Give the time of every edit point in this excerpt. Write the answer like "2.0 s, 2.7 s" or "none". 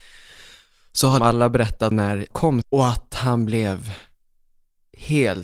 1.2 s, 1.9 s, 2.3 s, 2.6 s

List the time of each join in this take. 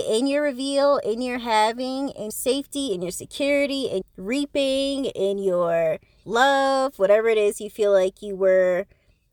2.3 s, 4.0 s, 6.2 s

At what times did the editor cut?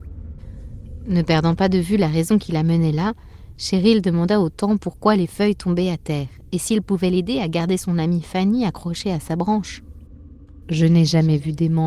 none

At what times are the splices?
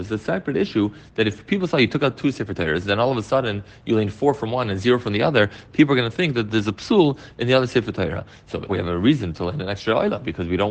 8.7 s

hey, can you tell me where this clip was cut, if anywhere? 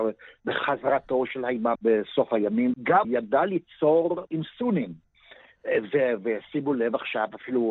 1.3 s, 1.8 s, 2.7 s, 3.0 s, 4.3 s

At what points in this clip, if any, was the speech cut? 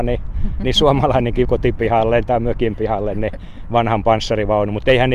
1.4 s

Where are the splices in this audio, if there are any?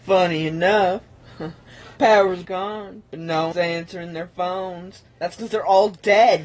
2.4 s, 3.5 s, 5.1 s

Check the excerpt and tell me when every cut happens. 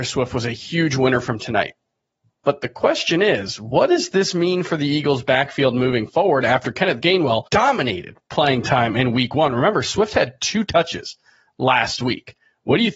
7.5 s

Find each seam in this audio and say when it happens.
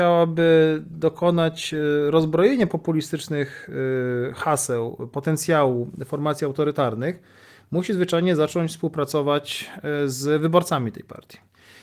none

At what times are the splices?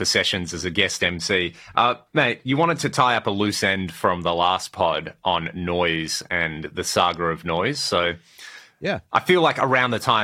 none

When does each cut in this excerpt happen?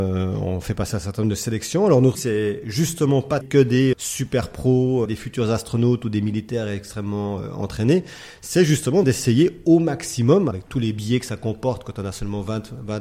2.1 s, 3.4 s, 3.9 s, 5.0 s, 9.0 s, 10.5 s

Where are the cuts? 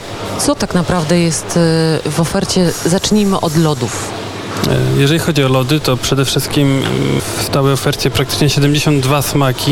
7.2 s

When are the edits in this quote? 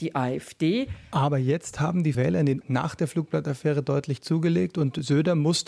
2.1 s, 2.6 s

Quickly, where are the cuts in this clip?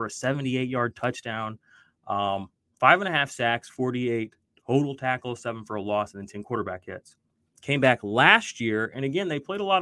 none

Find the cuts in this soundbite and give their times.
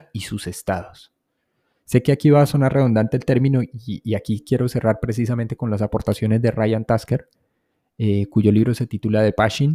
none

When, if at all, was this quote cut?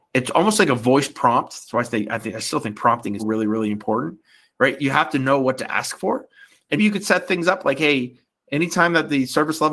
3.2 s, 6.8 s

